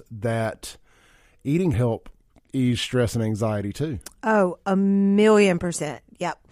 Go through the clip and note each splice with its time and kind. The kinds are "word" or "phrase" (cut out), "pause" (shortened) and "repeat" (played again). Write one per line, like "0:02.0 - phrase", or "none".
0:01.7 - phrase